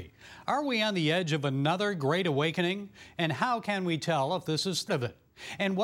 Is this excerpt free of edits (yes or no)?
no